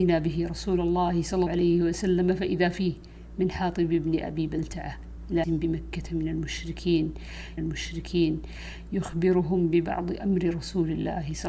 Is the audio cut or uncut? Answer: cut